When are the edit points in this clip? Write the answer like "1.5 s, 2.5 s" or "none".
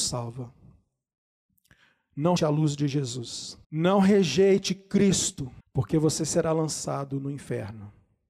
2.4 s, 3.6 s, 5.6 s